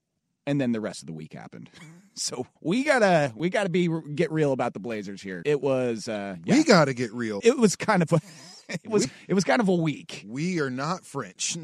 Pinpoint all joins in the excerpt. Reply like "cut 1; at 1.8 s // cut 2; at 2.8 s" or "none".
cut 1; at 2.6 s // cut 2; at 5.4 s // cut 3; at 7.4 s // cut 4; at 8.6 s // cut 5; at 9.0 s